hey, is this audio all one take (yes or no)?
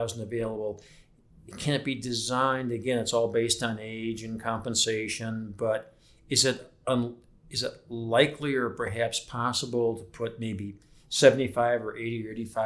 yes